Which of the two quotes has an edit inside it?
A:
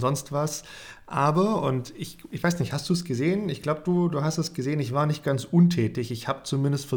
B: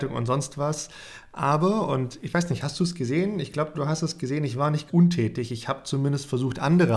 B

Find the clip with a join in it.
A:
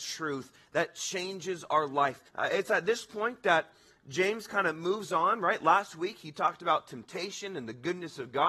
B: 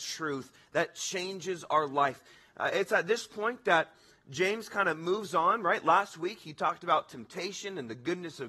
A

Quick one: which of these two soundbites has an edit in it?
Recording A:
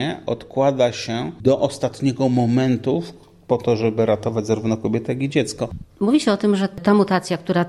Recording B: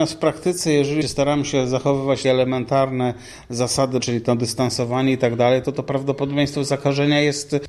B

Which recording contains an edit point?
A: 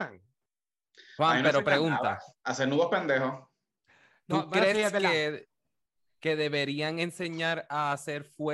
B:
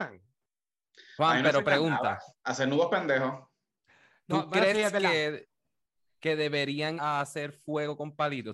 B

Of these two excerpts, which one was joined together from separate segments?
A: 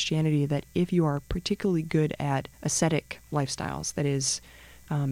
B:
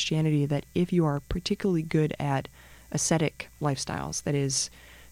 A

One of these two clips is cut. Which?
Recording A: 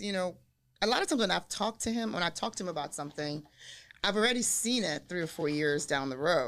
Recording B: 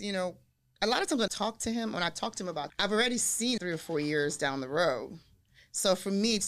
B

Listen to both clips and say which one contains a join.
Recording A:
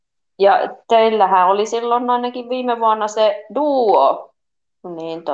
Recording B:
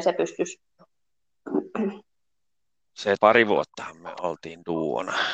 B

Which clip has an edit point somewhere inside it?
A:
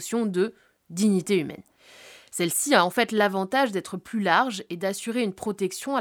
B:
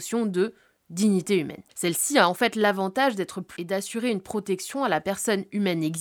B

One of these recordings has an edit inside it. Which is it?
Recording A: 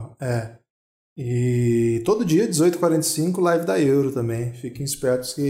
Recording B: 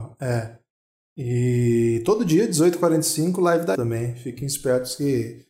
B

